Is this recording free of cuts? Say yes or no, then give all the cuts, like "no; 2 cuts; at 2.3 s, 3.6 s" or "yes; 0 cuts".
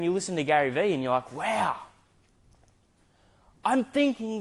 yes; 0 cuts